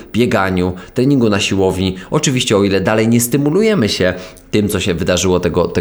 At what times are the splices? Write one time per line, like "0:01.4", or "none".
none